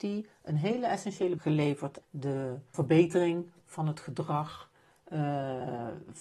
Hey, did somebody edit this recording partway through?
yes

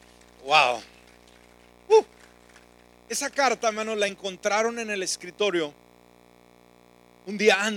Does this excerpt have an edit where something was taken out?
no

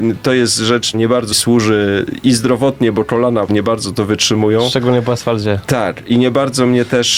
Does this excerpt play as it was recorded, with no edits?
no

